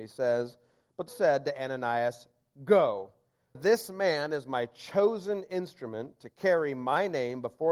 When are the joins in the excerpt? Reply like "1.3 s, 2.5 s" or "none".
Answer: 1.1 s, 3.5 s